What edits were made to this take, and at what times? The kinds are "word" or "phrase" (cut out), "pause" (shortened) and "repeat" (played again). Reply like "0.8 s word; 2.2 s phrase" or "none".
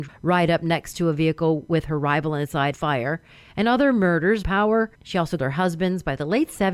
2.7 s phrase; 4.4 s phrase; 4.9 s pause; 5.4 s word